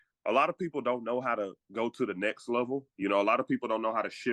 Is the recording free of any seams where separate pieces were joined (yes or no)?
yes